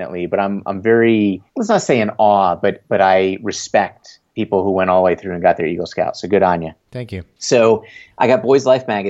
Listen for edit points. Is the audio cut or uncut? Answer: cut